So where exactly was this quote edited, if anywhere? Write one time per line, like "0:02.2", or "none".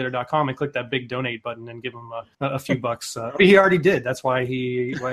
0:02.3
0:03.4